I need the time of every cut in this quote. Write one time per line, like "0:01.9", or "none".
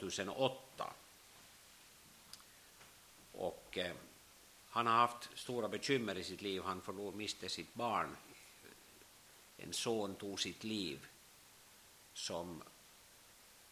none